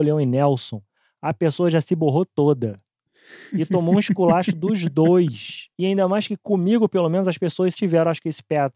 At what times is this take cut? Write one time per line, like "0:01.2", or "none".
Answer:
0:05.7
0:07.7